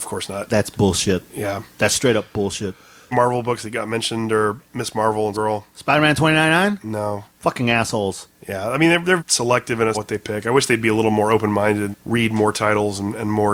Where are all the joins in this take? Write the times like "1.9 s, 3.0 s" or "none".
3.1 s, 5.3 s, 9.2 s, 9.9 s, 11.9 s